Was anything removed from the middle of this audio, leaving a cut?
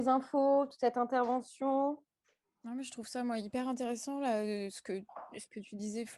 no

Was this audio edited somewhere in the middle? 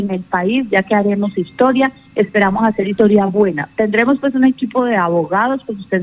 no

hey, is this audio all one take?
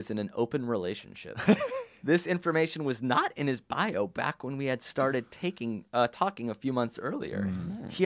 yes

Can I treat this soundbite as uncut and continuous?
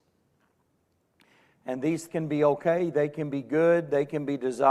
no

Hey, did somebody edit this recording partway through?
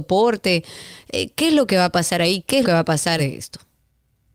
yes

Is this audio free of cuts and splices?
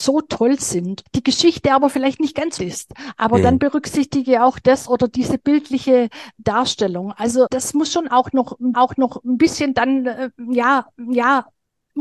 no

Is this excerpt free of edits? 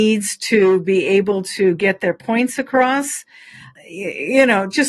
yes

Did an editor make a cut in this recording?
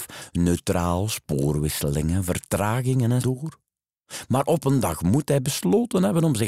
yes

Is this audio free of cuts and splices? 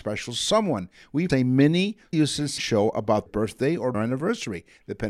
no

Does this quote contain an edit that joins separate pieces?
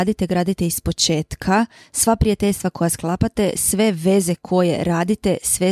no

